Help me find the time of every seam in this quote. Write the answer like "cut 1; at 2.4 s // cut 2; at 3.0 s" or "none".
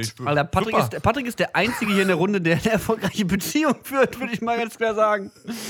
none